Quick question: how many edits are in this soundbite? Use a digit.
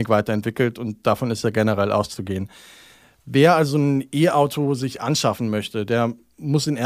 0